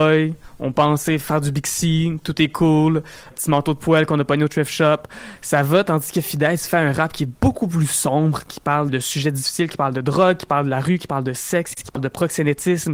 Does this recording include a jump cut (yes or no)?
yes